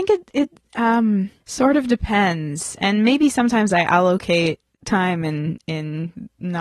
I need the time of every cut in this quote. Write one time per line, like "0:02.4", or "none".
0:01.4
0:04.7